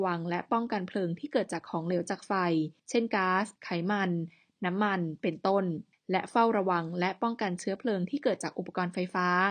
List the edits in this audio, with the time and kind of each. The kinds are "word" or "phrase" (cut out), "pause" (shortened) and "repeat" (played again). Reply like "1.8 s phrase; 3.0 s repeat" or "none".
2.8 s pause; 3.6 s pause; 5.9 s pause